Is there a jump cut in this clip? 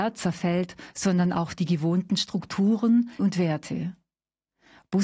yes; 1 cut; at 3.2 s

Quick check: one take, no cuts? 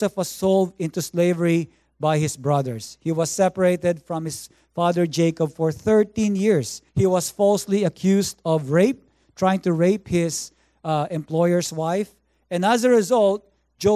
no; 1 cut; at 6.9 s

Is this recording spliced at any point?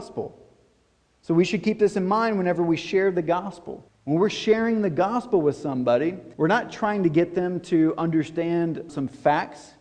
yes; 3 cuts; at 3.9 s, 6.3 s, 8.9 s

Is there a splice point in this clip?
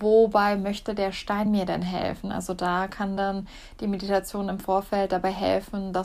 no; 0 cuts

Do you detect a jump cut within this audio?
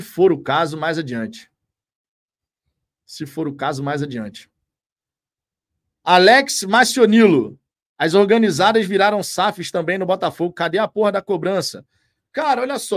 no; 0 cuts

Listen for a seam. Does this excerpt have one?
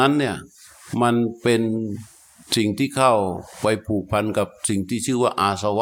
no; 0 cuts

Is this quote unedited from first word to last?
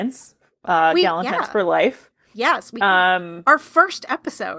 yes; 0 cuts

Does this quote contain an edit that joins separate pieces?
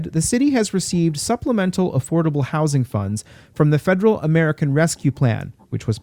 no; 0 cuts

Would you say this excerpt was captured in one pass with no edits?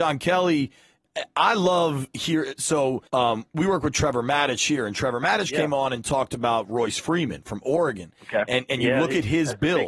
no; 1 cut; at 3.1 s

